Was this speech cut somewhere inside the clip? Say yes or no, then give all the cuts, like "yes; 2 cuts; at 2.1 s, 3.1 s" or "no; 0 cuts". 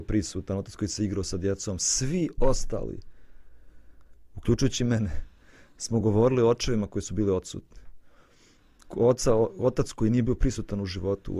no; 0 cuts